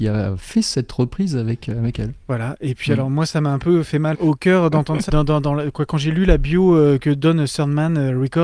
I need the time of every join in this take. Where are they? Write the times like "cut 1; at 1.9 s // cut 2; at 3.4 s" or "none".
cut 1; at 2.2 s // cut 2; at 4.1 s // cut 3; at 5.1 s